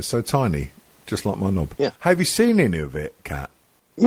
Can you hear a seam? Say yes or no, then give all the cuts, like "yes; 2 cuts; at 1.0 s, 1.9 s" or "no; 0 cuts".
yes; 1 cut; at 2.0 s